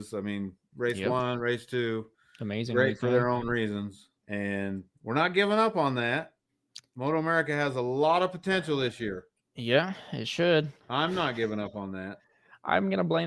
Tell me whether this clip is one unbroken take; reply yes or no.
no